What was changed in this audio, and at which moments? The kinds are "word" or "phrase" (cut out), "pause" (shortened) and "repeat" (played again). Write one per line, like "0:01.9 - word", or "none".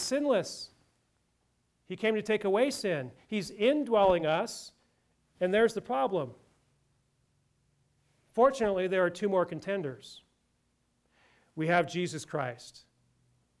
none